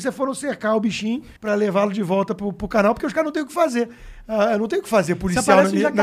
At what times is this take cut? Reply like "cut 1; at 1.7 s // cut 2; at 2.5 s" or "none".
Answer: cut 1; at 1.4 s